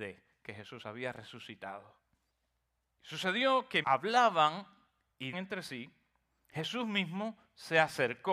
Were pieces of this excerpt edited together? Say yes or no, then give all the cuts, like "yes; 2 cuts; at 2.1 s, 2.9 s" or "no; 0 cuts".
yes; 3 cuts; at 2.3 s, 3.8 s, 5.3 s